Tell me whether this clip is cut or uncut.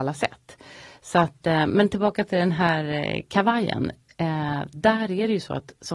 uncut